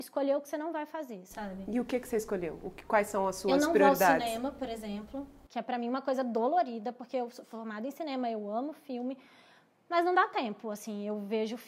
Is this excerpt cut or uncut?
uncut